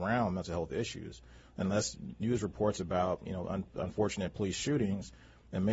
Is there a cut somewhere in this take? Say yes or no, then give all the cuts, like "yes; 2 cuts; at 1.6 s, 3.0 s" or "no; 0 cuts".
no; 0 cuts